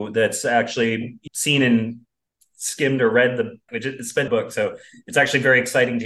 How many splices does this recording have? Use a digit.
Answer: 3